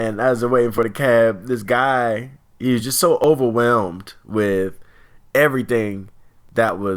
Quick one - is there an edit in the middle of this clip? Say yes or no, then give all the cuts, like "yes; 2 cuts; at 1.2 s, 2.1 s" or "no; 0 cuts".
no; 0 cuts